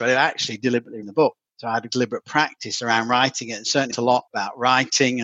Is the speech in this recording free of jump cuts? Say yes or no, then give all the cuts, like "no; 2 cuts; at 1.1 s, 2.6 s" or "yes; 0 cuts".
no; 4 cuts; at 1.0 s, 1.9 s, 3.9 s, 4.3 s